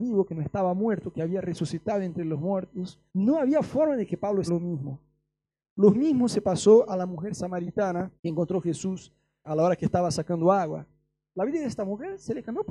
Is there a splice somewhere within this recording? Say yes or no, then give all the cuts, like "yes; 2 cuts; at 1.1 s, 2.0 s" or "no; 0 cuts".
yes; 4 cuts; at 3.1 s, 4.5 s, 8.2 s, 9.4 s